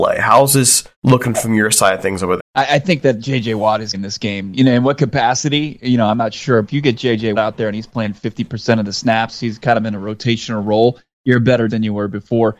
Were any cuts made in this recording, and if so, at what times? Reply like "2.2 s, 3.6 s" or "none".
0.9 s, 2.4 s, 3.9 s, 6.6 s, 7.3 s, 11.7 s